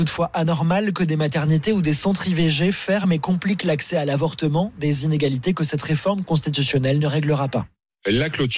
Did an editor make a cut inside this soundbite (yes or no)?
no